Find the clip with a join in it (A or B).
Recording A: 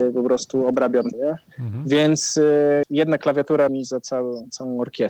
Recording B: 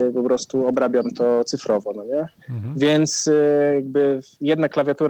A